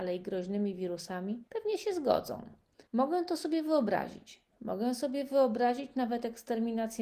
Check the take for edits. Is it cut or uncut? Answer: cut